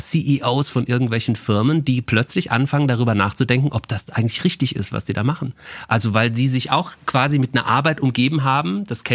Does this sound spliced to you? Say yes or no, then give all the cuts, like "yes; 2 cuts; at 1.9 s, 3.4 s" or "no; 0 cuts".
no; 0 cuts